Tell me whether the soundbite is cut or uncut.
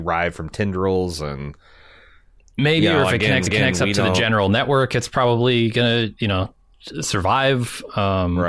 cut